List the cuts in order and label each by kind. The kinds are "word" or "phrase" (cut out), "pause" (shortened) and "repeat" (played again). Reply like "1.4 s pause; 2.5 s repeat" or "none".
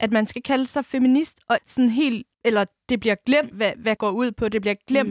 1.6 s word; 2.3 s pause; 3.5 s word; 4.0 s word